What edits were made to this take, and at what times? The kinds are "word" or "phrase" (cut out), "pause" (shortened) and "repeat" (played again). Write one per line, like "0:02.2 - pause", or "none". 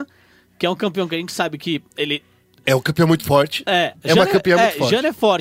0:01.9 - pause

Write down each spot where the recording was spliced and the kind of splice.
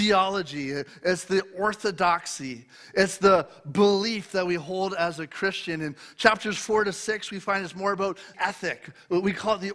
0:08.3 - word

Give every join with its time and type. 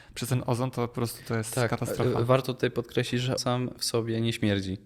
0:03.4 - word

